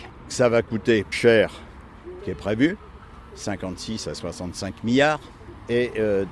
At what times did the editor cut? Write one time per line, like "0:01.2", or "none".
0:01.1
0:02.2